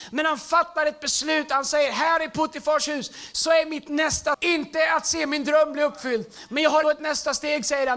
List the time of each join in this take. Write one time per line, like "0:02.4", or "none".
0:04.3
0:06.8

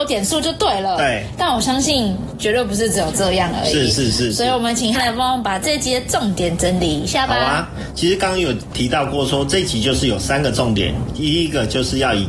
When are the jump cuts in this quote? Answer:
0:04.9

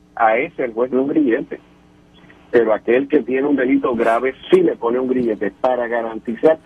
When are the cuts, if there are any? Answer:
0:00.9
0:04.4

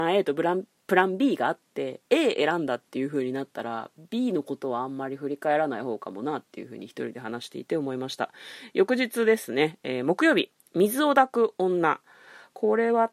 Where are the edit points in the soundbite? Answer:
none

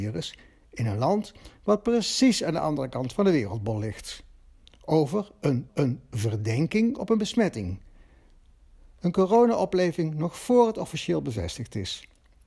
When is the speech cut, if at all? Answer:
0:05.7

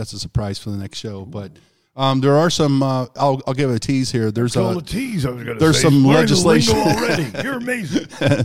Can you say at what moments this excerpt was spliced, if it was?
none

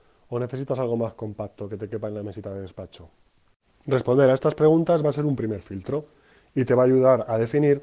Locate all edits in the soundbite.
none

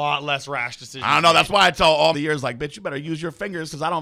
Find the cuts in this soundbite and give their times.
0:02.1

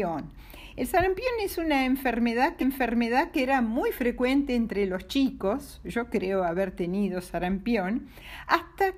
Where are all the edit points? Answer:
0:02.6

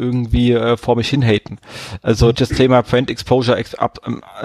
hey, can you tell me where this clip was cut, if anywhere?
0:02.3

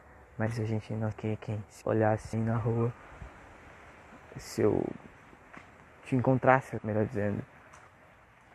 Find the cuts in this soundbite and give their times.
0:01.1
0:01.8
0:02.3
0:06.8

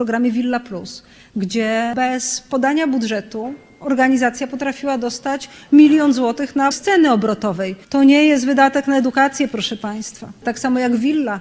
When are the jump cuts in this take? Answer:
0:06.7
0:07.8

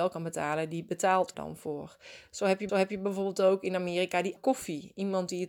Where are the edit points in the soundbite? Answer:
0:01.3
0:02.7
0:04.4

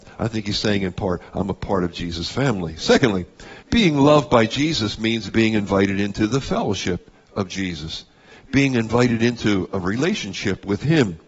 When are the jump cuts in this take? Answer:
0:03.6

